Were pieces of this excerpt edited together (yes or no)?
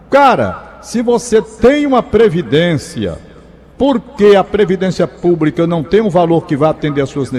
no